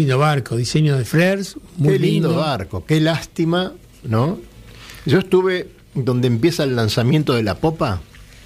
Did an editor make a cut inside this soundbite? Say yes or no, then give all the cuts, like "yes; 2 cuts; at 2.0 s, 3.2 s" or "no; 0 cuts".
no; 0 cuts